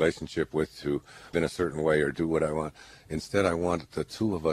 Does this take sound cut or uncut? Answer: cut